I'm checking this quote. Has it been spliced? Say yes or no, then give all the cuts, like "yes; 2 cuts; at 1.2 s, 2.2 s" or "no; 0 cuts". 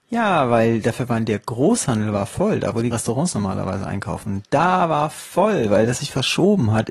yes; 2 cuts; at 2.9 s, 6.0 s